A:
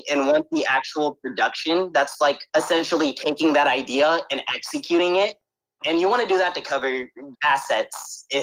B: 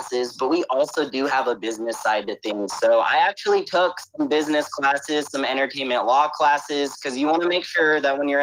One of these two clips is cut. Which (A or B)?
A